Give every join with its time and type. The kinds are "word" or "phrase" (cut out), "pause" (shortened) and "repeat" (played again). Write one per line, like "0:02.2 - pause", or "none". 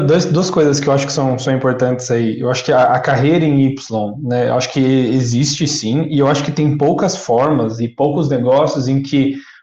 none

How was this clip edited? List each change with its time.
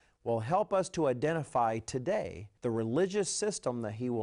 0:02.6 - pause

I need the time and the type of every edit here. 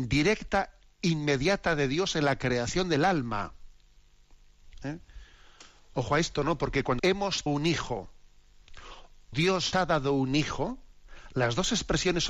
0:07.0 - word
0:07.5 - word
0:09.3 - word
0:09.7 - word

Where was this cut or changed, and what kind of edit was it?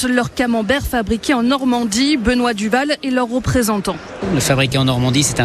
none

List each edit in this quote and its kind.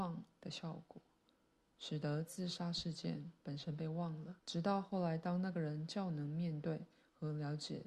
0:04.4 - pause

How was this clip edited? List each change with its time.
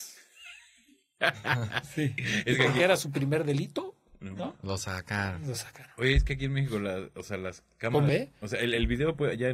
0:08.1 - word

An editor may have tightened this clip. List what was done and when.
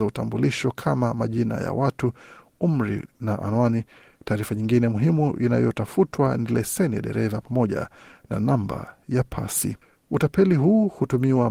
none

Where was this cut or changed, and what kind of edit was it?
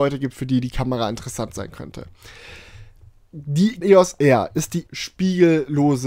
0:03.8 - word
0:04.9 - word

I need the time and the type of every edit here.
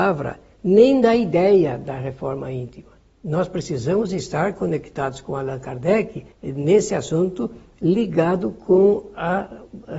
0:03.0 - pause
0:06.3 - pause

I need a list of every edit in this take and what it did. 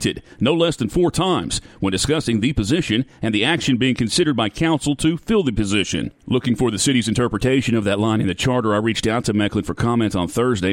0:06.2 - pause

